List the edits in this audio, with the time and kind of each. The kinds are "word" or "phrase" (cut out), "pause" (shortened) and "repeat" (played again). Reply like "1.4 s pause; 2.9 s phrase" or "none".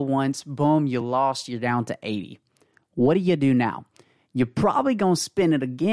none

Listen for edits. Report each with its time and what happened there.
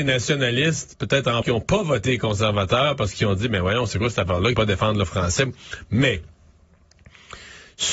1.4 s word; 4.5 s word

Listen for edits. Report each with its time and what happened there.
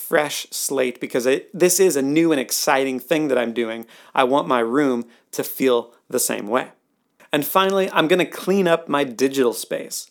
none

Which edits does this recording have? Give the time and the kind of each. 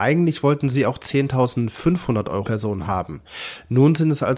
2.4 s word

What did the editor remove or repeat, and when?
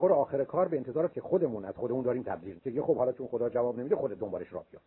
1.1 s word; 2.6 s word

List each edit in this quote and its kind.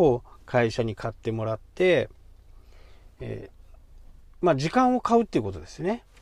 4.2 s pause

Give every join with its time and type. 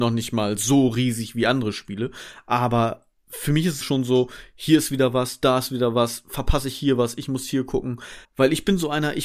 3.8 s word; 8.2 s pause

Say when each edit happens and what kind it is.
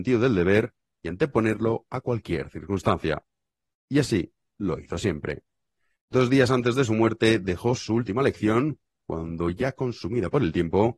none

